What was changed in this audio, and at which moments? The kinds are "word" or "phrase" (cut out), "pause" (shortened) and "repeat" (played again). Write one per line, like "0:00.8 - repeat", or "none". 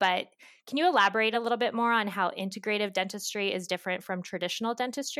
none